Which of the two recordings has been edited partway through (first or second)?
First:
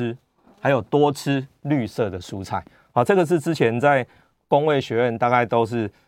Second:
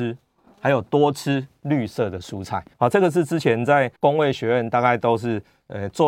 second